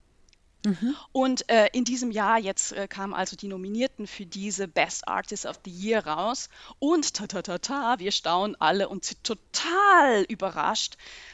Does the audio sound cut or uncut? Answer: uncut